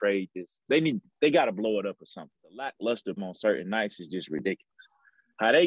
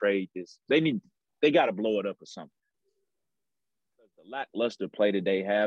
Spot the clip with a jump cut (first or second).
first